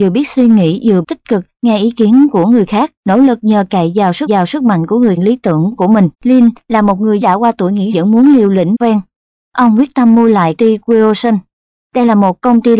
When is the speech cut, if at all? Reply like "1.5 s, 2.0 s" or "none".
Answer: 1.0 s, 3.0 s, 4.3 s, 5.2 s, 6.1 s, 7.2 s, 7.9 s, 8.7 s, 10.6 s